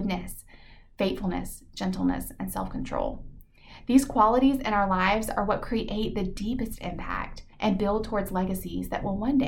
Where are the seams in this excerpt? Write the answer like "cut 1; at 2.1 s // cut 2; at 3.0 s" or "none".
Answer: cut 1; at 7.5 s